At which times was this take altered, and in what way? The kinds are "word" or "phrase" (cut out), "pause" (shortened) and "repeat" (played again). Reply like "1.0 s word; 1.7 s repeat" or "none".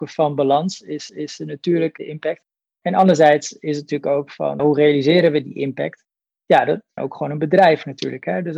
1.1 s repeat; 4.6 s word; 7.0 s word

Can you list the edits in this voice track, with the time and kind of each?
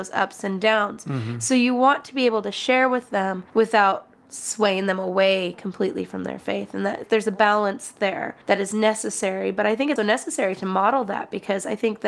3.5 s pause; 7.0 s word; 8.4 s pause; 10.0 s word

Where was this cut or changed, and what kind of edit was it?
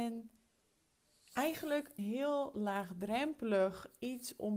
2.0 s word

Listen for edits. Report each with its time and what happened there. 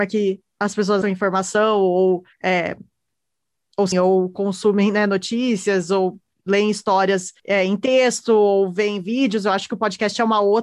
1.0 s word; 2.3 s pause; 3.9 s word; 7.4 s pause

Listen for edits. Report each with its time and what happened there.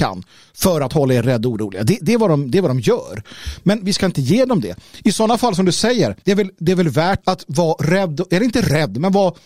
6.2 s pause; 7.2 s word

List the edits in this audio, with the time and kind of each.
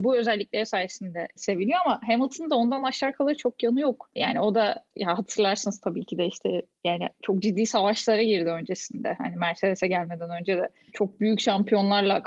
none

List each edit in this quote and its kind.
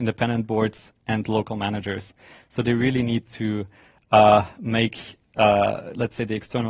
none

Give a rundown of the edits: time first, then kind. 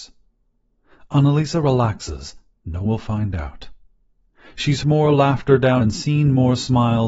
2.8 s word; 4.8 s word; 5.8 s word

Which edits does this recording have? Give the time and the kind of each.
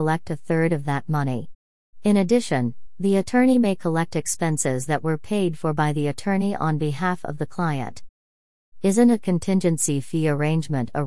none

